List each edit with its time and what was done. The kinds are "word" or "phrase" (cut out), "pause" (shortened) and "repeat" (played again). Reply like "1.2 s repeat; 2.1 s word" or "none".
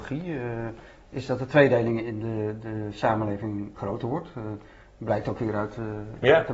3.7 s word